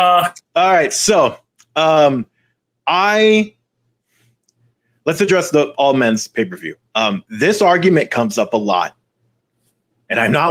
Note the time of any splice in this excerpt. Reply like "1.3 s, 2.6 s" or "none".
none